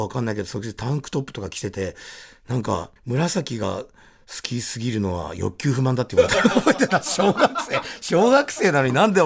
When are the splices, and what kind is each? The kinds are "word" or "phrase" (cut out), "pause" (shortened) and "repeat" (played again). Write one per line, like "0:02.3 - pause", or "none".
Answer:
0:03.0 - pause